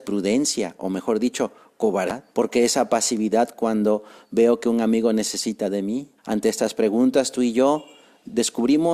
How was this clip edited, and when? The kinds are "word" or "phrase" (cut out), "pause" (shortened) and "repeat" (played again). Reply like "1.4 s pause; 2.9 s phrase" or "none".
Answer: 2.3 s pause; 6.2 s pause

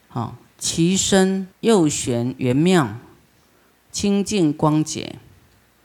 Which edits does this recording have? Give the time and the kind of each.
1.5 s pause

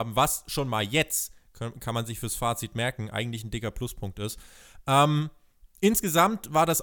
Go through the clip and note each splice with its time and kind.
none

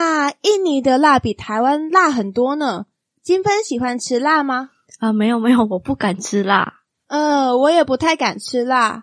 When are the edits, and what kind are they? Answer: none

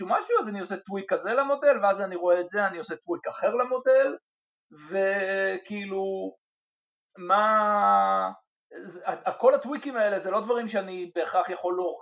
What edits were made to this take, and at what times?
none

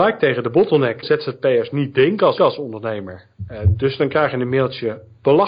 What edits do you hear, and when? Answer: 1.0 s phrase; 2.4 s repeat

